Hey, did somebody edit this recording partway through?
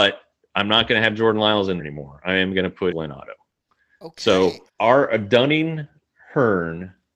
yes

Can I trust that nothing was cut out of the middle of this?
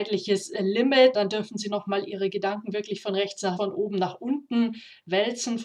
no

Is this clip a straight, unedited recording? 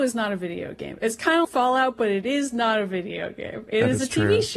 no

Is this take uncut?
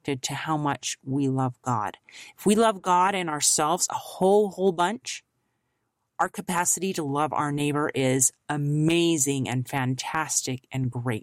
yes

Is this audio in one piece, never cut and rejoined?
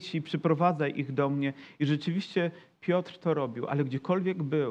yes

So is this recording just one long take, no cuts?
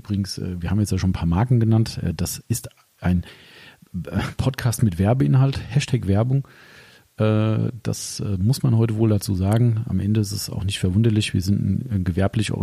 yes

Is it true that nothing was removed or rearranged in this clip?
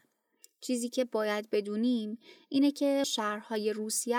no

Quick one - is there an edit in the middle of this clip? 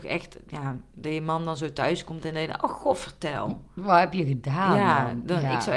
no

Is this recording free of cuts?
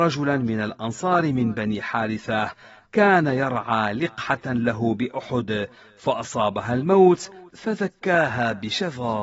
yes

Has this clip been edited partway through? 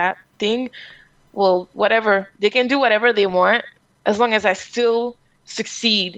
no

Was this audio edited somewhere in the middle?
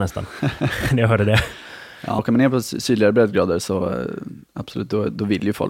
yes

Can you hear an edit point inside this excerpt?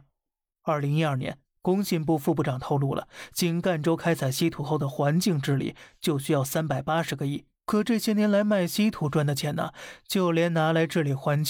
yes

